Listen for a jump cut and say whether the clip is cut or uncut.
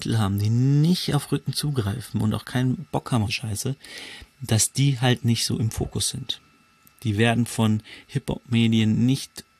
cut